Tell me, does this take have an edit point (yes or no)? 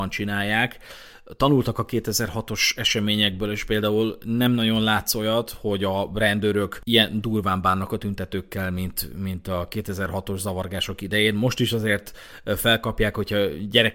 no